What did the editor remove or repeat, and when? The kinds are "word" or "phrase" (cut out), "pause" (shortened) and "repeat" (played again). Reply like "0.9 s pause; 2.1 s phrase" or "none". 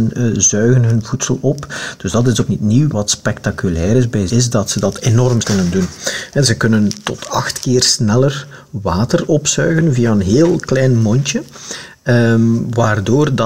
2.5 s word; 2.9 s word; 4.3 s word; 5.4 s word